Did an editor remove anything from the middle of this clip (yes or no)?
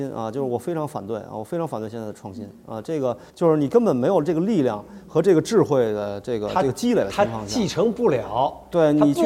yes